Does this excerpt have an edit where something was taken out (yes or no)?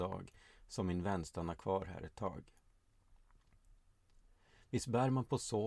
no